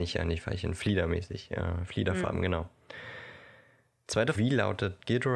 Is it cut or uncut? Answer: cut